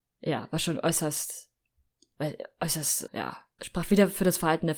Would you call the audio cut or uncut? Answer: cut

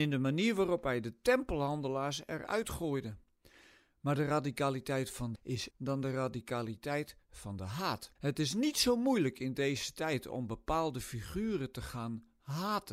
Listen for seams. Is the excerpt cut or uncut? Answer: cut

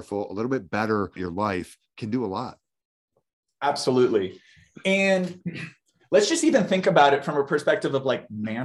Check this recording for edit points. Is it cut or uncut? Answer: cut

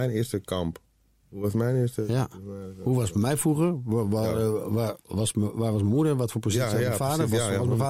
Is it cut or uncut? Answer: uncut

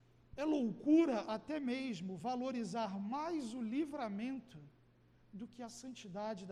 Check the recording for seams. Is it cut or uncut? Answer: uncut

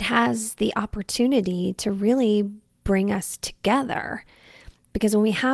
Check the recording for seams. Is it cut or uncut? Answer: uncut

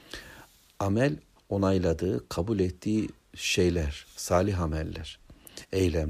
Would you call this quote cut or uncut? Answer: cut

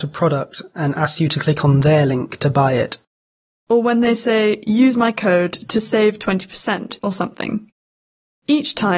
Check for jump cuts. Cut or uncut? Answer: uncut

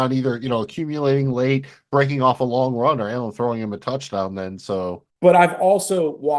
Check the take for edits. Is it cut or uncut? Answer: cut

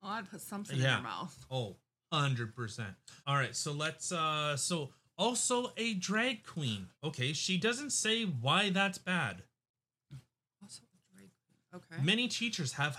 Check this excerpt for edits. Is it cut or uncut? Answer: cut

